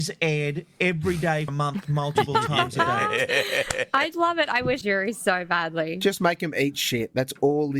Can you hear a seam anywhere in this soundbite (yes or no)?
yes